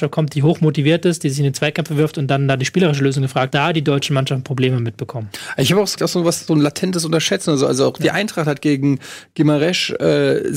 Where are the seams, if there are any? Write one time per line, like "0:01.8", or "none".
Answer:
0:03.5
0:06.0
0:06.5